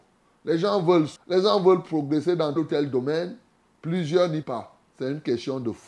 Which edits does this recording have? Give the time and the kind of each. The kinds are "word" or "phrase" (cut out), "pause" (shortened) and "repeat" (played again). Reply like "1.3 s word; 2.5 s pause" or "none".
1.2 s word; 2.6 s word; 4.4 s word